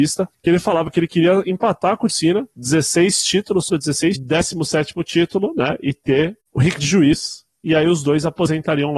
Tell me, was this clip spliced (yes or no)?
yes